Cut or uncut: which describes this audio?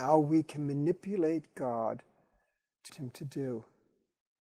cut